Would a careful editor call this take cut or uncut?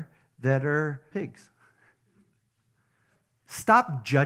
cut